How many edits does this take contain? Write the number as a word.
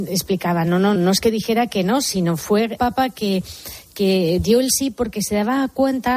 two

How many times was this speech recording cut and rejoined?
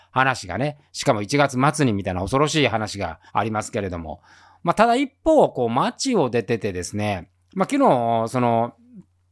one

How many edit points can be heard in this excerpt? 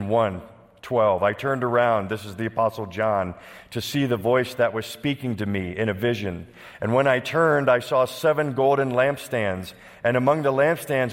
zero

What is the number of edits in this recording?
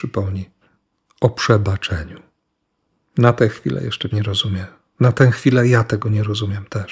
one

